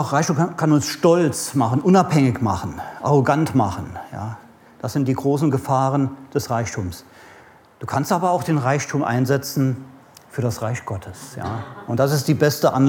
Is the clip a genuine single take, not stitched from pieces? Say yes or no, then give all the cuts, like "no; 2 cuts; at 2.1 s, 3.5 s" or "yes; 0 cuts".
yes; 0 cuts